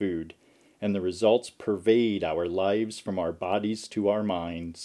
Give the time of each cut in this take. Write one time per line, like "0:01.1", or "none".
none